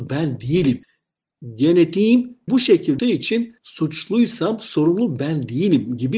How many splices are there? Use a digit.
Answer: 3